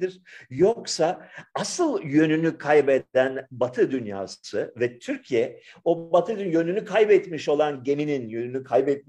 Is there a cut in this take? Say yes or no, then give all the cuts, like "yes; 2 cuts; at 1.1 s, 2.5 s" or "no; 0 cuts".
no; 0 cuts